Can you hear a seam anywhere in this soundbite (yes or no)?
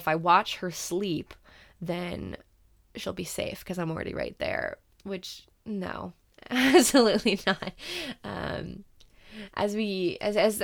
no